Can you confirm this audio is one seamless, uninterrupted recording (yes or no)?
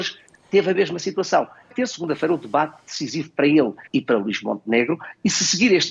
no